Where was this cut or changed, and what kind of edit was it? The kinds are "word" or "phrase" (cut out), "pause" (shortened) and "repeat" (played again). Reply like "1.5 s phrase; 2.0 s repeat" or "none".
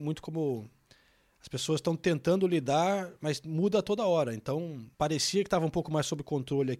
4.9 s pause